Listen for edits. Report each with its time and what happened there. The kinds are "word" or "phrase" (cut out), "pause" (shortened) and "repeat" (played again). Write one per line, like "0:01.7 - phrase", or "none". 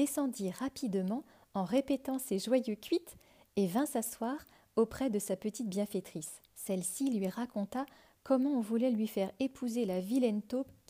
0:06.5 - pause